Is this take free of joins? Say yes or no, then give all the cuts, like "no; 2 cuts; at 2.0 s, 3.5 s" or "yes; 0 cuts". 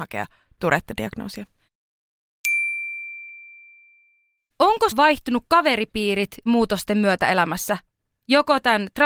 no; 2 cuts; at 4.9 s, 6.5 s